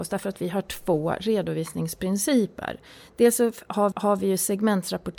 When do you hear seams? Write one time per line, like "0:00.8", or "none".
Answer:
0:03.9